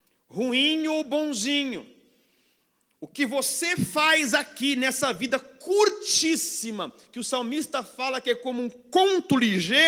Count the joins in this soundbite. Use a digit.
0